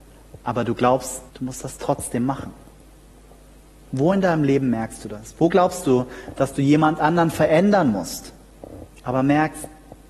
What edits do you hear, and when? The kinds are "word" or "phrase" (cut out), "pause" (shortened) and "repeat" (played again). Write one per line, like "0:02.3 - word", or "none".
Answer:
0:01.3 - pause